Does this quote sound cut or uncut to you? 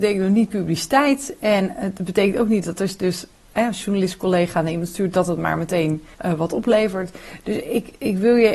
cut